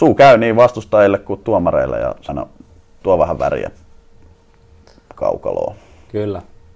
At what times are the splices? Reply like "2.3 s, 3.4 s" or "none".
1.4 s, 2.3 s, 3.0 s